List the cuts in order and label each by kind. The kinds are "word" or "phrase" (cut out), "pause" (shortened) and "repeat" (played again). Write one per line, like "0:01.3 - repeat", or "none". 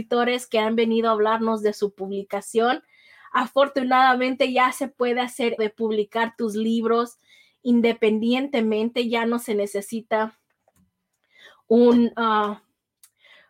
0:05.6 - word

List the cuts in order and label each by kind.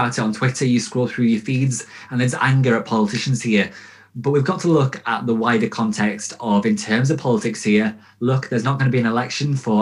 none

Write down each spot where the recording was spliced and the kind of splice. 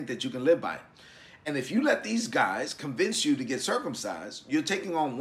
none

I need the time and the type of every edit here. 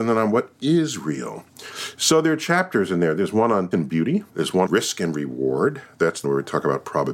0:03.7 - word
0:04.3 - pause
0:04.7 - word
0:06.2 - word

